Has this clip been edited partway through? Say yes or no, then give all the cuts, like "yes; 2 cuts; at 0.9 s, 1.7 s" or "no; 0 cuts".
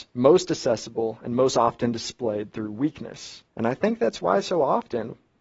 yes; 1 cut; at 3.5 s